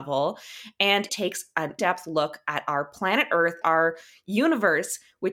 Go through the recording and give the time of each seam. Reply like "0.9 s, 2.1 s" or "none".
1.1 s, 1.8 s, 3.6 s